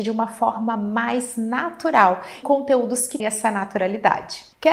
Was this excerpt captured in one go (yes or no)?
no